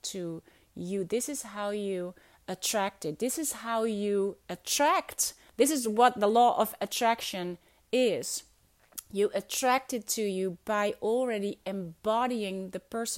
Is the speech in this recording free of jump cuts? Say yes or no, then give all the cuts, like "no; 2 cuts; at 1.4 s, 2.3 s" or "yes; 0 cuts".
yes; 0 cuts